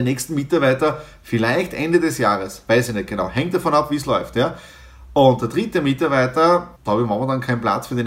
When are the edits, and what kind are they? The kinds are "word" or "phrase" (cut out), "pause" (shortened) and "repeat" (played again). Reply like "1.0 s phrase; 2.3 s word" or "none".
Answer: 6.8 s pause